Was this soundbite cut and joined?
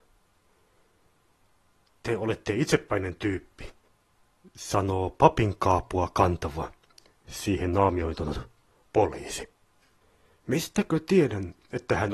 no; 0 cuts

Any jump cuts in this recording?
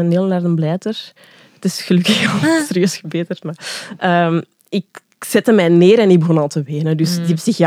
no; 0 cuts

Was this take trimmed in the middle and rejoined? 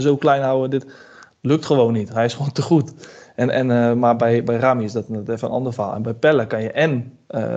no; 0 cuts

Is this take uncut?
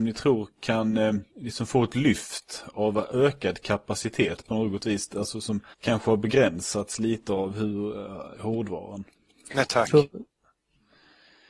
no; 3 cuts; at 1.3 s, 5.7 s, 8.3 s

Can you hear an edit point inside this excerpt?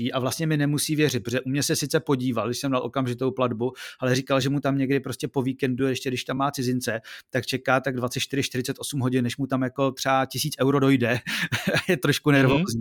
no; 0 cuts

